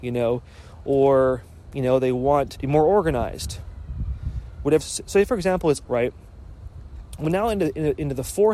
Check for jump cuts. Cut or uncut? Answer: cut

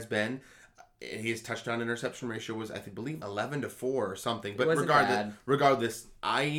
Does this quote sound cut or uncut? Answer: cut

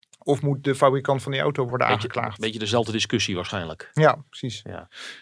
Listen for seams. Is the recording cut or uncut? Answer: uncut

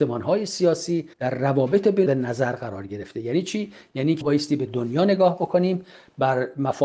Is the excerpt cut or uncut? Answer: cut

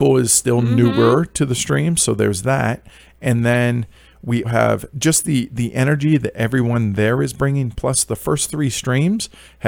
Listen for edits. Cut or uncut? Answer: cut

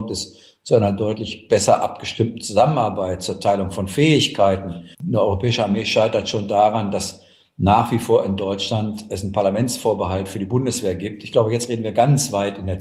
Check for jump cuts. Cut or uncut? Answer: cut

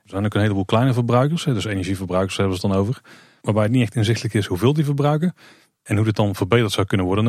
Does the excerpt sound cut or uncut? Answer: uncut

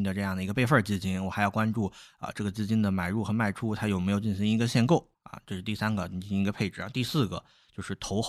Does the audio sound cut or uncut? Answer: cut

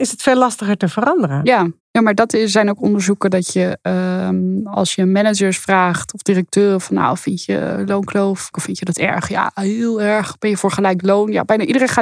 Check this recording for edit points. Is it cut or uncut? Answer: cut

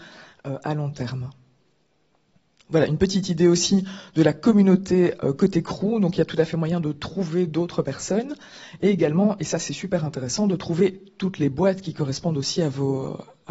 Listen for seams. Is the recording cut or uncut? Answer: uncut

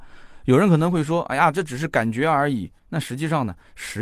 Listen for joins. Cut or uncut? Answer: cut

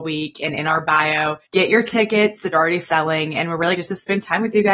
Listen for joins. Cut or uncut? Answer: cut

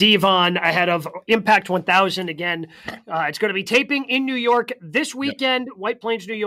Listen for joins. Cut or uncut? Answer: uncut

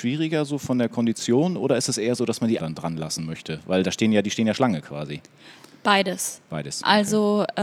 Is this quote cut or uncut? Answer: cut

